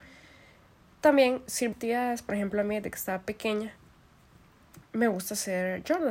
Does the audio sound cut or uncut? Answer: cut